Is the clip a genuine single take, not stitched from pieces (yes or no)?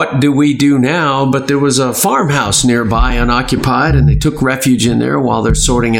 yes